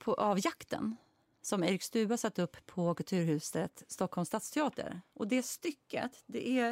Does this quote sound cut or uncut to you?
uncut